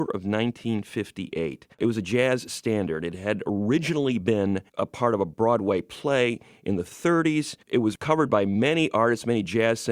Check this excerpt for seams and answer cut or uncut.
cut